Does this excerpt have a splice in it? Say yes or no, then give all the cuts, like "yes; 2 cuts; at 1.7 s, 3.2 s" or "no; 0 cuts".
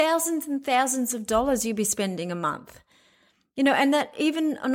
no; 0 cuts